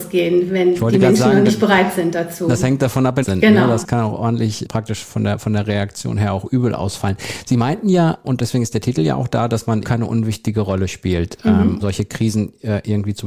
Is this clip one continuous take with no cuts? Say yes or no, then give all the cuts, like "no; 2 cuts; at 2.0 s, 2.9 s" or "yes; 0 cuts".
no; 4 cuts; at 3.2 s, 8.2 s, 9.8 s, 11.8 s